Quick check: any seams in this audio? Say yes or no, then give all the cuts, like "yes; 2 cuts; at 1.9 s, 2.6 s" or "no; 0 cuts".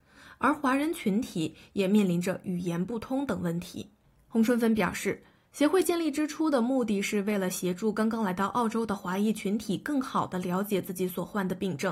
no; 0 cuts